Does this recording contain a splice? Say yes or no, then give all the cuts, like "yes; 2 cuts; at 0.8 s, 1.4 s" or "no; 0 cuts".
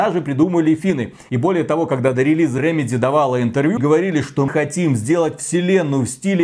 yes; 3 cuts; at 2.6 s, 3.8 s, 4.5 s